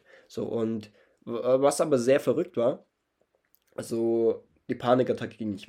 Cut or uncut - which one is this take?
uncut